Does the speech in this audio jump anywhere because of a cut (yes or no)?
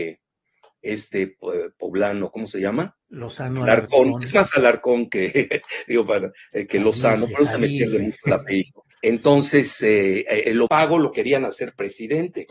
yes